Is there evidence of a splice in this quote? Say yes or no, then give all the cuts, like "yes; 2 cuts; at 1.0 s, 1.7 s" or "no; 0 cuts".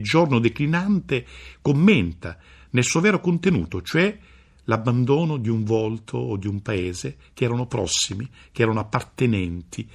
no; 0 cuts